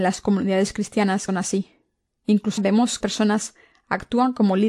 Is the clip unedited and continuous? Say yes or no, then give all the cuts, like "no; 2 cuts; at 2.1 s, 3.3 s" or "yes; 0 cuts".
no; 3 cuts; at 1.3 s, 2.6 s, 3.0 s